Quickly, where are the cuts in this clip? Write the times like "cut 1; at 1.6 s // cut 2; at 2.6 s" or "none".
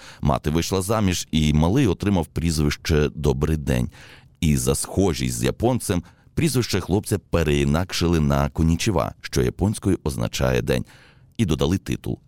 cut 1; at 10.6 s